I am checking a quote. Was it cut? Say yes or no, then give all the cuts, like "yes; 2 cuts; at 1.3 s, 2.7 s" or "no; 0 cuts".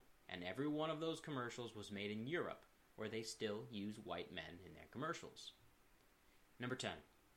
no; 0 cuts